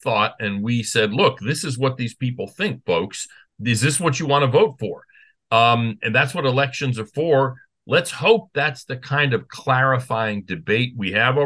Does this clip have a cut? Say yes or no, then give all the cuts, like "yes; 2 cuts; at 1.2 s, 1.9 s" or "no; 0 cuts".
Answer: no; 0 cuts